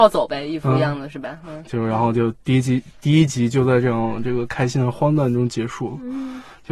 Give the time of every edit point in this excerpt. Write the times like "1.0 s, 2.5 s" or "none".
1.6 s